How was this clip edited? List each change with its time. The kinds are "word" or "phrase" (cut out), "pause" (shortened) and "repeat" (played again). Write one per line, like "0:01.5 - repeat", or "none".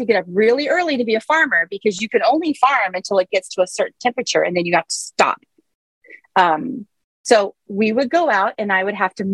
none